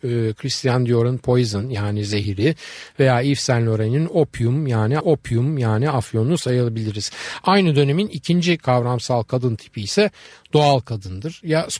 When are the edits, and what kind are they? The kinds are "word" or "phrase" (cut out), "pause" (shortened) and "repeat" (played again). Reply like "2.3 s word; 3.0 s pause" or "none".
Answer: 5.0 s repeat

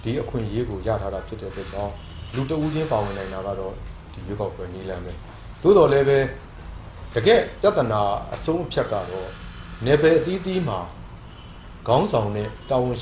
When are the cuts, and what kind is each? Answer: none

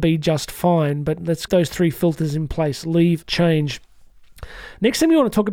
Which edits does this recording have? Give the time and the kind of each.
1.5 s word; 3.2 s word

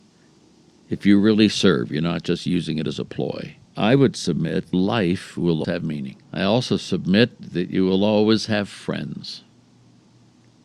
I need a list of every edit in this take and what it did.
3.7 s pause; 4.7 s phrase; 5.6 s word; 6.2 s pause

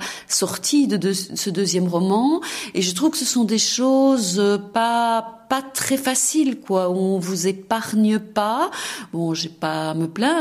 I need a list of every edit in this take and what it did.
none

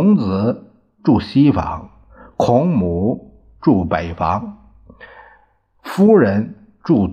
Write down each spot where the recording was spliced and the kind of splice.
none

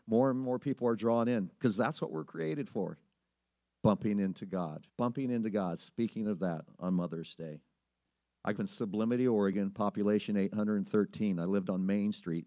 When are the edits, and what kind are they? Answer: 3.4 s pause; 4.9 s pause; 8.5 s phrase

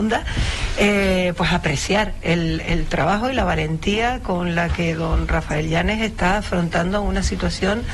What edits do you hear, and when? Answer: none

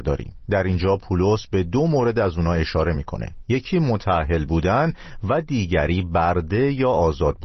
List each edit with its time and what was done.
none

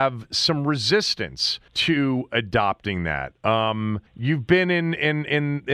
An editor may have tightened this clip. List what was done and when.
1.7 s pause; 4.1 s pause

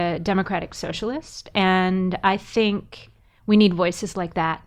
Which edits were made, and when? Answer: none

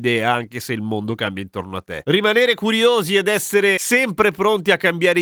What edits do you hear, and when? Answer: none

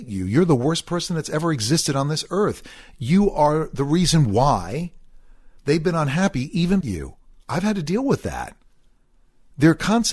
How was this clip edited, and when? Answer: 5.6 s pause; 6.8 s phrase

